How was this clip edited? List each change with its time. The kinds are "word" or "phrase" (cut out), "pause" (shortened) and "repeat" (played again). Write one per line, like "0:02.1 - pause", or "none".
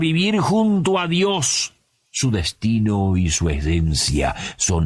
none